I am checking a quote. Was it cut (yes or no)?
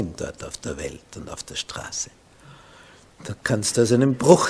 no